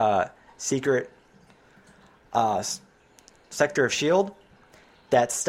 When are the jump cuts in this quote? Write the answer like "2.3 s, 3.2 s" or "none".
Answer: none